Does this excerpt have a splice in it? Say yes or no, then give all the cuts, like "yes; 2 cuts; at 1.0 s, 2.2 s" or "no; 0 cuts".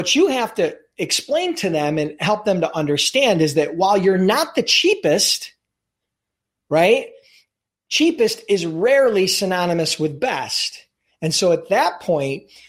no; 0 cuts